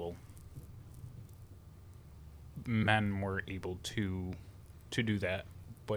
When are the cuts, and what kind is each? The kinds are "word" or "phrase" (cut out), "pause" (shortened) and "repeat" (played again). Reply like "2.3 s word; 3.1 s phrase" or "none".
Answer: none